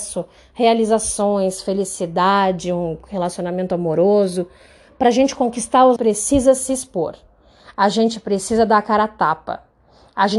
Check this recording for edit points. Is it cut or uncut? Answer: cut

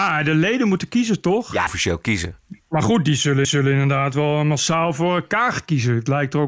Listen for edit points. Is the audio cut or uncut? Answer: cut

